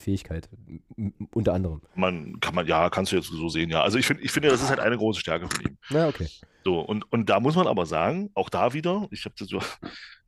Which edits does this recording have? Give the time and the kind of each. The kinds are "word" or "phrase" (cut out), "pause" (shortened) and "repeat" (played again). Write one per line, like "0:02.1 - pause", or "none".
none